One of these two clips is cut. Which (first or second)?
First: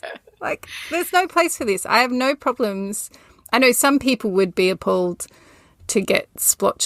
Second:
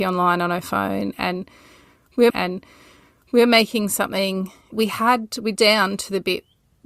second